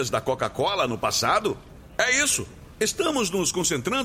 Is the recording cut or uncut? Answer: uncut